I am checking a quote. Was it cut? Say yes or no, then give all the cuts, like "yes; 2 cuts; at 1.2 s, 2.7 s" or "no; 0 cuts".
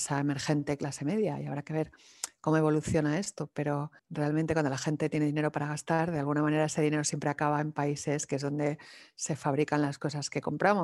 yes; 1 cut; at 4.0 s